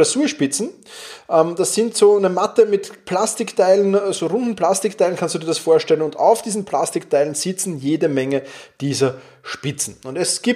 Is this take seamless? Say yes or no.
yes